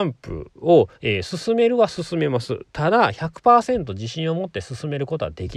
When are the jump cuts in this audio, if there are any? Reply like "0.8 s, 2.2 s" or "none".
0.9 s